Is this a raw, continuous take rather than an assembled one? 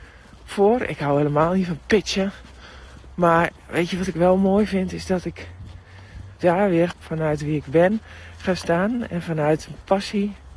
no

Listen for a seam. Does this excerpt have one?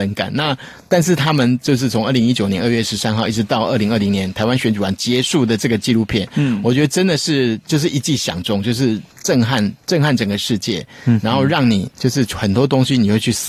yes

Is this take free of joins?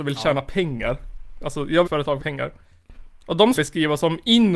no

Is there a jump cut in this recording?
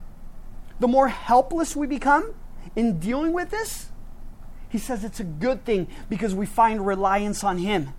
no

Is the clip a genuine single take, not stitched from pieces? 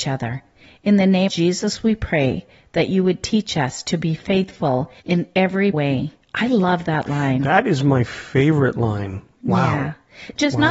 no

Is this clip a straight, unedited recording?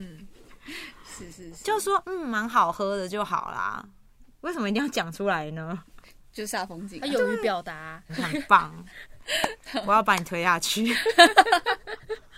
no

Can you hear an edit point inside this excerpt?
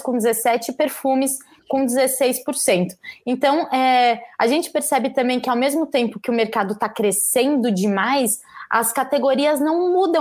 no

